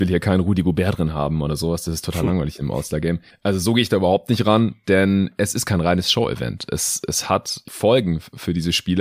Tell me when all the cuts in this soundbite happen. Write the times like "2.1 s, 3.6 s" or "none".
7.6 s

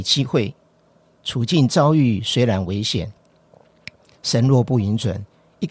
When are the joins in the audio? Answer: none

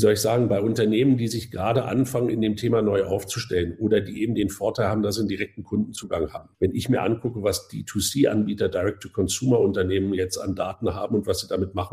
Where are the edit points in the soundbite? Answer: 6.5 s

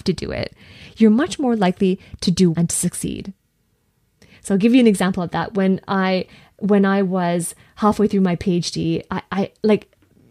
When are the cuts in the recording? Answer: 2.5 s

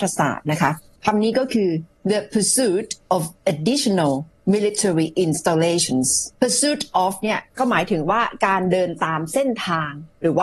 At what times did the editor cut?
2.0 s, 3.0 s, 6.3 s

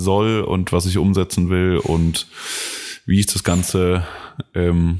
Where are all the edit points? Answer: none

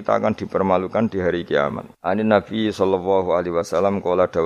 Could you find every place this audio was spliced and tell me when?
1.9 s

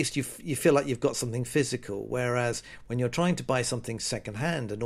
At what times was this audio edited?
none

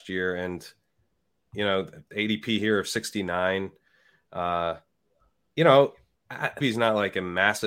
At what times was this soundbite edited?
6.6 s

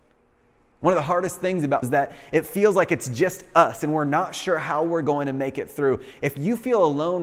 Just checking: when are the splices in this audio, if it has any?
1.8 s

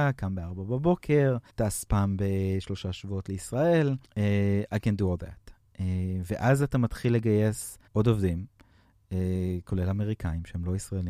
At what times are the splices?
1.5 s, 4.0 s, 7.9 s

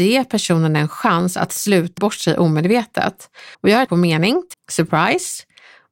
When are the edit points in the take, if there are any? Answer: 2.0 s, 3.5 s, 3.9 s, 4.5 s

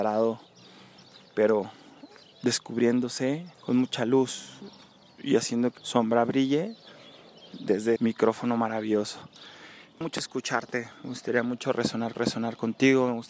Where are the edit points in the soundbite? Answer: 3.5 s, 5.8 s, 8.0 s, 10.0 s, 12.1 s

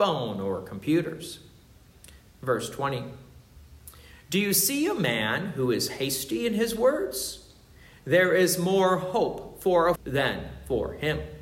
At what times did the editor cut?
10.0 s

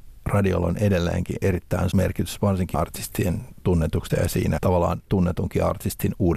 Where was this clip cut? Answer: 1.9 s, 2.7 s, 4.1 s, 4.6 s, 5.1 s

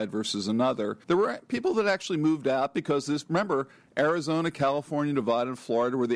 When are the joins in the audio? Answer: 1.0 s

